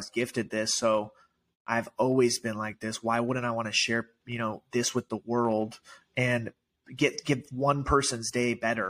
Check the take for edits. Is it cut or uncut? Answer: uncut